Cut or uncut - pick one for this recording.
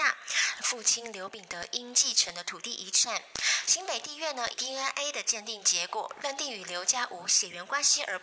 cut